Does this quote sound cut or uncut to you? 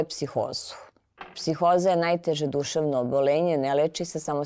uncut